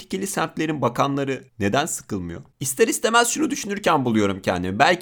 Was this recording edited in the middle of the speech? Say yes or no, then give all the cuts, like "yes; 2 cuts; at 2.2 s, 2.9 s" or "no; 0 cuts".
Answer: yes; 2 cuts; at 1.5 s, 2.5 s